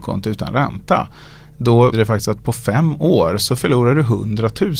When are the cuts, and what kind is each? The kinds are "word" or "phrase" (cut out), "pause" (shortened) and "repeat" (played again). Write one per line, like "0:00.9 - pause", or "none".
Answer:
0:01.9 - word